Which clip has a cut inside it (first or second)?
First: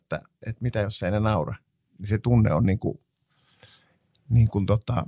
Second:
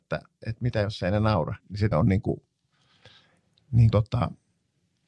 second